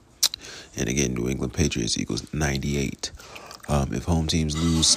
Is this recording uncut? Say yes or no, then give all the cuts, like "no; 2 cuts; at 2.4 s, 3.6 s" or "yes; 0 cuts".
yes; 0 cuts